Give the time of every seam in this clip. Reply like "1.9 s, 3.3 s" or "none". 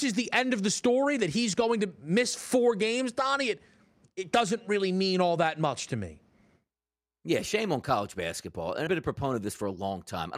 8.9 s